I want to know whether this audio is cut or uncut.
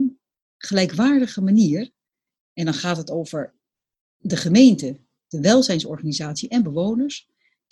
uncut